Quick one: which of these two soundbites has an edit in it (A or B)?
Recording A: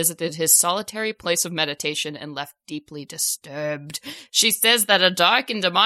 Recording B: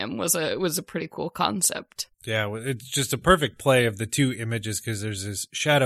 B